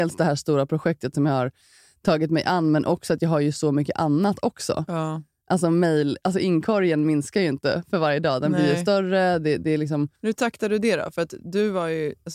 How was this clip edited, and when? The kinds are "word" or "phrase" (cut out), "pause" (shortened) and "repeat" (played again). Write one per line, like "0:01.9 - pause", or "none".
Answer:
0:10.2 - pause